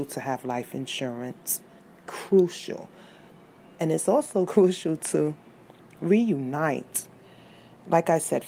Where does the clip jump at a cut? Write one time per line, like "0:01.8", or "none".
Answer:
none